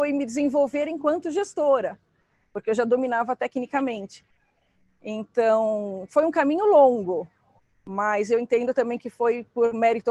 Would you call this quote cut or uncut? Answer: uncut